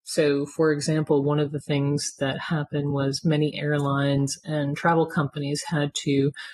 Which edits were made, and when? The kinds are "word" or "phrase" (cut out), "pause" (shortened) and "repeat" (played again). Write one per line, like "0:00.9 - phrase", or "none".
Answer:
none